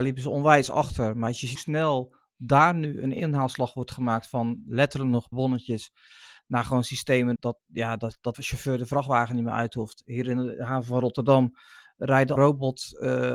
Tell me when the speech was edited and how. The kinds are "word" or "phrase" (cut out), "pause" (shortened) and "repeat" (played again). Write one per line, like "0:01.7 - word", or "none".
0:01.5 - word
0:05.3 - word
0:07.4 - word
0:08.3 - word
0:12.4 - word